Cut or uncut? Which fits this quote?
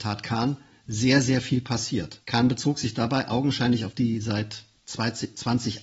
cut